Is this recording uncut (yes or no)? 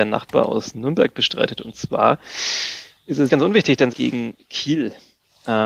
no